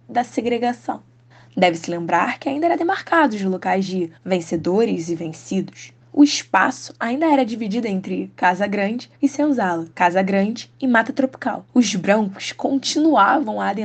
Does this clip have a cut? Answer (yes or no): yes